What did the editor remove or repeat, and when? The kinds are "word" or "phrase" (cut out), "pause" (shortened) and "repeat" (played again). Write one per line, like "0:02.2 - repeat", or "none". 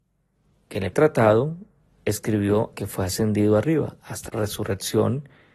0:00.9 - word
0:02.7 - word
0:04.3 - word